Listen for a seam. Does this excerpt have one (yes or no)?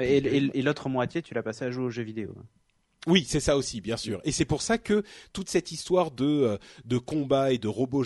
no